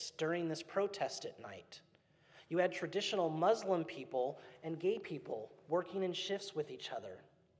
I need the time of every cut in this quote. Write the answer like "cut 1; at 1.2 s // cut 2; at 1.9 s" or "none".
none

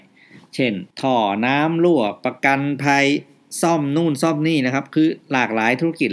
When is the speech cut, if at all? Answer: cut 1; at 0.9 s

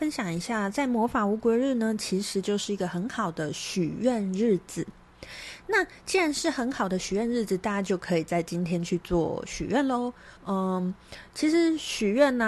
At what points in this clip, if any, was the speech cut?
cut 1; at 10.4 s

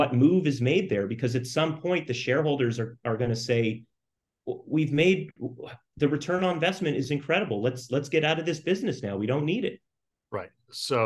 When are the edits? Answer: none

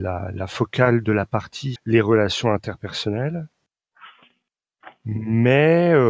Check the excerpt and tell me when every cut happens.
cut 1; at 1.8 s

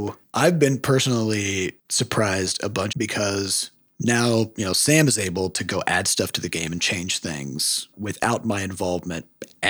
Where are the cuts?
cut 1; at 2.9 s // cut 2; at 7.9 s

